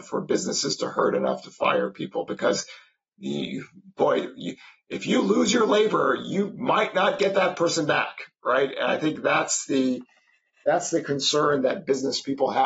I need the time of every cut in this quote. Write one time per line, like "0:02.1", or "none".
none